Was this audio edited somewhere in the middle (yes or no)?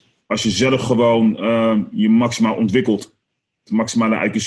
no